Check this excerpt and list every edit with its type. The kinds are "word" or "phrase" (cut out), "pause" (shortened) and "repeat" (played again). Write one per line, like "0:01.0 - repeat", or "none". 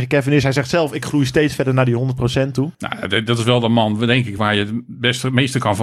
none